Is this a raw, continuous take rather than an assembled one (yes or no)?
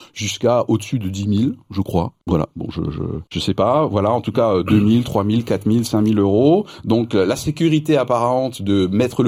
no